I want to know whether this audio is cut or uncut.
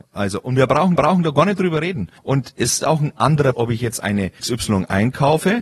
cut